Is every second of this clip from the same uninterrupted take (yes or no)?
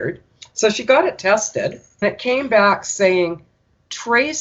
no